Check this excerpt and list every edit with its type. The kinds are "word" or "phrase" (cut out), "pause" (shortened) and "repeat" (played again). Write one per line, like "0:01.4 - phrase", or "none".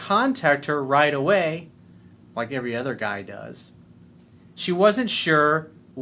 none